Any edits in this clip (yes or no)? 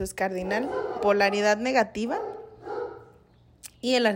yes